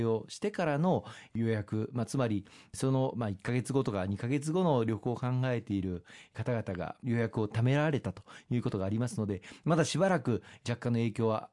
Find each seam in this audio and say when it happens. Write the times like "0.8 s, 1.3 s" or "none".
none